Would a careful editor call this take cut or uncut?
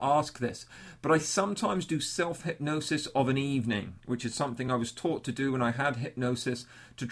uncut